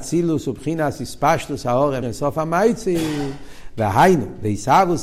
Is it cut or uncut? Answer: cut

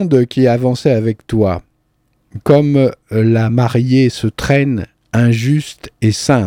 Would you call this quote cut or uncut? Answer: uncut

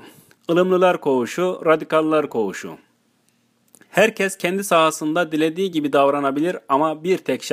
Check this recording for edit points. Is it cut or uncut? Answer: uncut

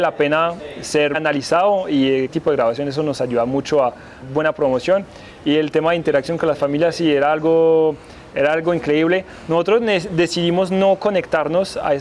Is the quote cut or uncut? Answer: cut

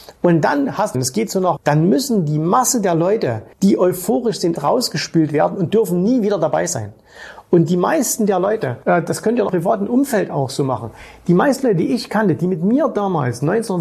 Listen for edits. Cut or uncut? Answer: cut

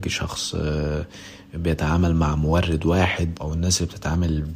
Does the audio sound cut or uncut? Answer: cut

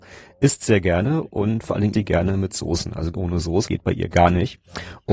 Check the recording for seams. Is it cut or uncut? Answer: cut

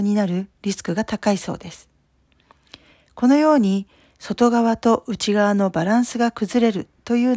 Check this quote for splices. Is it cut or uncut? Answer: uncut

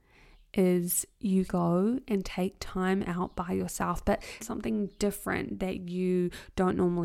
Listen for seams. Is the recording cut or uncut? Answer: cut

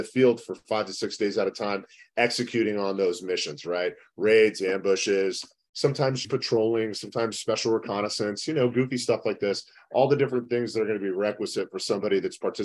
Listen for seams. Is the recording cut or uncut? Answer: cut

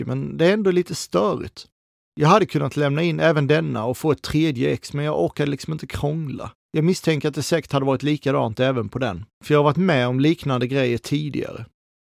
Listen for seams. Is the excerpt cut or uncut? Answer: uncut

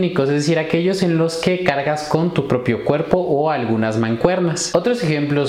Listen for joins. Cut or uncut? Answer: uncut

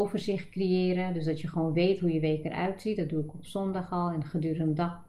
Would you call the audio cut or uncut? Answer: uncut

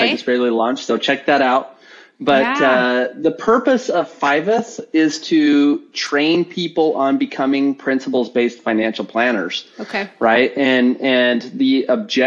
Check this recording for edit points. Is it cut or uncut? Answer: uncut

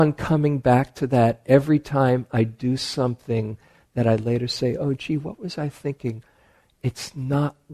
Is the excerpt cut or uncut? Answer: uncut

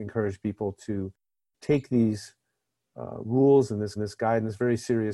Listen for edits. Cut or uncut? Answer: cut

